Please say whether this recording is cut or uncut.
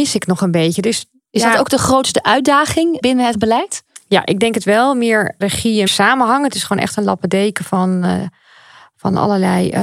cut